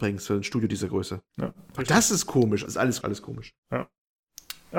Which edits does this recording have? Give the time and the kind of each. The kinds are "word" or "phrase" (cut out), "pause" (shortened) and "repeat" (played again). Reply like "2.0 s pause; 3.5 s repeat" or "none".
1.3 s pause; 2.7 s word; 3.0 s word; 3.6 s pause

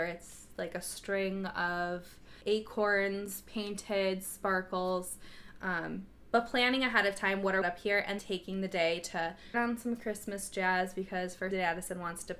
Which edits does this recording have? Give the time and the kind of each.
2.4 s pause; 7.6 s phrase; 8.2 s word; 9.5 s word; 11.5 s phrase

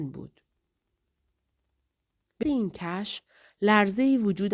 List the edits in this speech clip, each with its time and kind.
2.4 s word

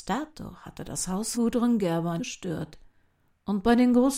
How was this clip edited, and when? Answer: 1.3 s word; 2.2 s word

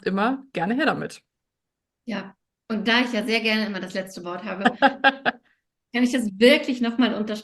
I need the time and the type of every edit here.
none

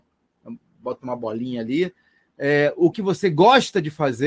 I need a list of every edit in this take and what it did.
2.9 s word

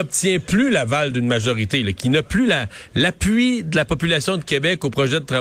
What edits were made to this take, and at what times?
none

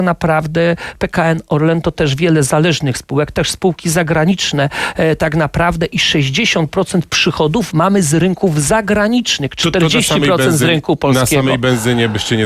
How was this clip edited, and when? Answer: none

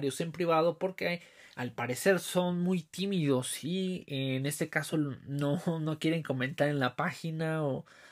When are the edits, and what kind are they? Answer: none

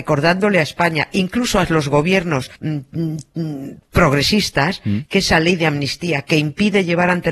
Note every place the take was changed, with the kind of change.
2.6 s pause

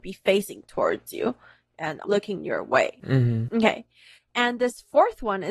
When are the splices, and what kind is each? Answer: 2.0 s word

